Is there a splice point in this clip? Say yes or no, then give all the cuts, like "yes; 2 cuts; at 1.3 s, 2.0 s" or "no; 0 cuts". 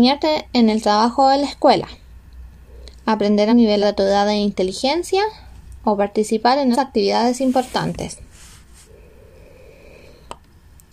yes; 3 cuts; at 3.5 s, 3.8 s, 6.7 s